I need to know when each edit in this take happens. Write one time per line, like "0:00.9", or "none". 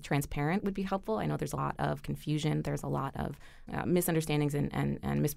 0:01.6
0:03.7